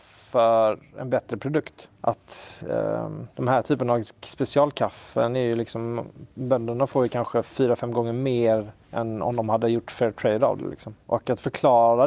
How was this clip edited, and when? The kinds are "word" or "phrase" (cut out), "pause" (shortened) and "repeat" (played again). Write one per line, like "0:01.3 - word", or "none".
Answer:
0:01.9 - pause
0:03.3 - pause
0:08.8 - pause
0:11.0 - pause